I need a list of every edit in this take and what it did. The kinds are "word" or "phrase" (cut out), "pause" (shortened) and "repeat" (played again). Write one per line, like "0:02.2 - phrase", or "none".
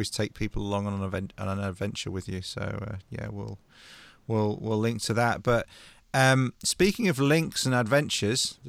none